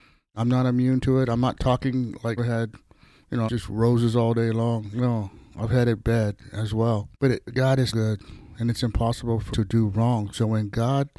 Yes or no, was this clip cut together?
yes